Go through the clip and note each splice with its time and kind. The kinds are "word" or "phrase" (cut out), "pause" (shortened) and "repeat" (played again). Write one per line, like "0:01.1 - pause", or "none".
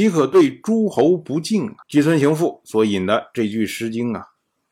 0:01.8 - pause

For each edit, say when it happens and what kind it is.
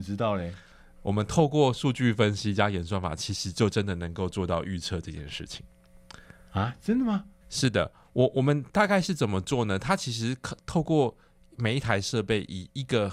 0:07.4 - pause

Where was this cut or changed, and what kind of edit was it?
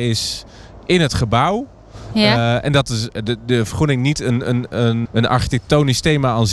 0:05.1 - word

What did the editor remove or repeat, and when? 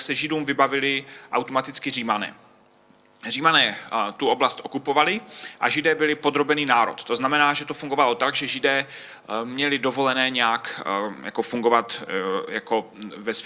none

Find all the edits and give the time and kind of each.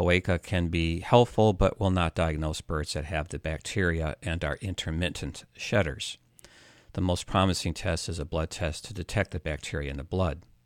none

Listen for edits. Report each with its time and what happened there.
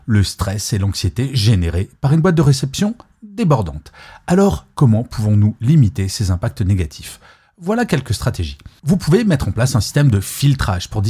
none

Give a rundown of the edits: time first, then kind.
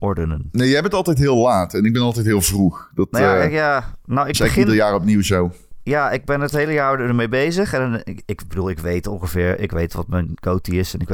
none

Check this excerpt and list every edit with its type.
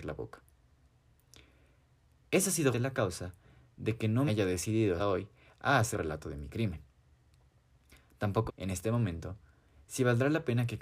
0:02.7 - word
0:04.3 - word
0:05.0 - word
0:05.9 - word
0:08.5 - word

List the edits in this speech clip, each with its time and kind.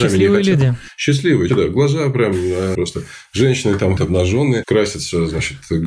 0:01.5 - word
0:02.7 - word
0:04.0 - word

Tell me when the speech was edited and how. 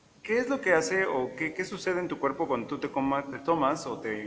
none

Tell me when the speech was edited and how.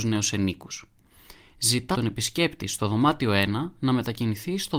0:01.9 - word

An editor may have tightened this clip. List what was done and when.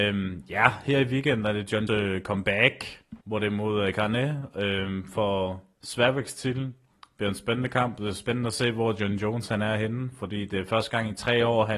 0:01.9 - word
0:03.2 - pause
0:05.8 - word

